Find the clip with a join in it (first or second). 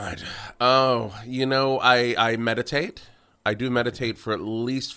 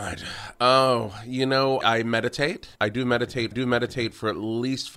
second